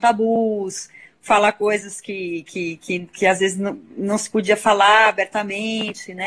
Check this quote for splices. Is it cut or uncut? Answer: uncut